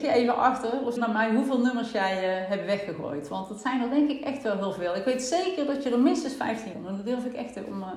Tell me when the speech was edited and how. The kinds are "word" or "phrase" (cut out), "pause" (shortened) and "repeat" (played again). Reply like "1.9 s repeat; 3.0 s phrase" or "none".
1.0 s word; 6.7 s word